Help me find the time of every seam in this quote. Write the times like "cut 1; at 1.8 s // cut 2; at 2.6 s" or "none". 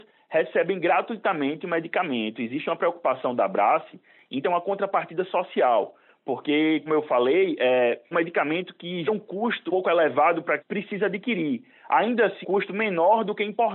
cut 1; at 4.4 s // cut 2; at 6.9 s // cut 3; at 8.1 s // cut 4; at 9.1 s // cut 5; at 9.7 s // cut 6; at 10.6 s // cut 7; at 12.4 s

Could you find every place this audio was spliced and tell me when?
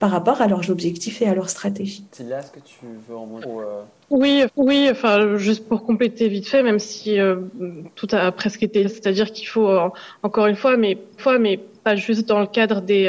cut 1; at 2.1 s // cut 2; at 3.4 s // cut 3; at 4.5 s // cut 4; at 8.8 s // cut 5; at 11.2 s

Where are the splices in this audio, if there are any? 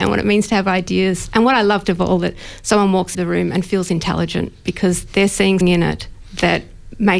cut 1; at 1.8 s // cut 2; at 3.1 s // cut 3; at 5.6 s

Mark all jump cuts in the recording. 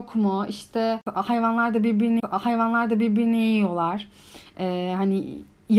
cut 1; at 2.2 s

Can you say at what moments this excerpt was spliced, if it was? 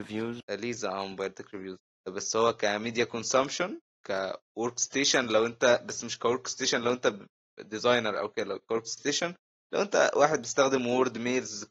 none

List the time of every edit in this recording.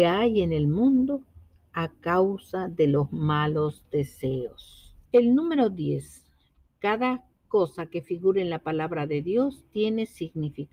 cut 1; at 5.0 s

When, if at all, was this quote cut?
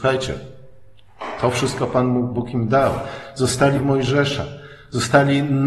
cut 1; at 3.7 s

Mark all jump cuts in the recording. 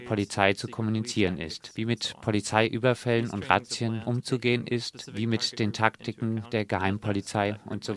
none

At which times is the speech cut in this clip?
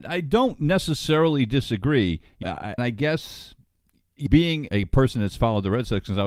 cut 1; at 2.4 s // cut 2; at 2.8 s // cut 3; at 4.3 s // cut 4; at 4.7 s

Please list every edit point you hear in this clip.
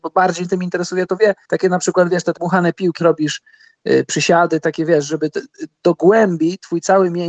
cut 1; at 1.4 s // cut 2; at 2.3 s // cut 3; at 3.0 s // cut 4; at 4.6 s // cut 5; at 5.7 s

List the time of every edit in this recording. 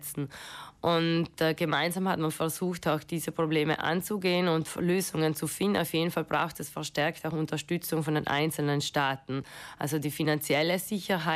none

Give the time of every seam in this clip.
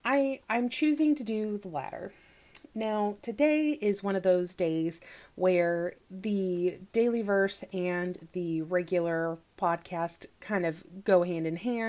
cut 1; at 2.7 s // cut 2; at 6.0 s

